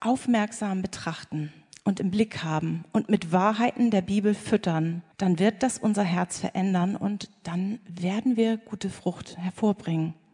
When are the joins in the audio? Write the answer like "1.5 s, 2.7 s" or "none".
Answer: 5.1 s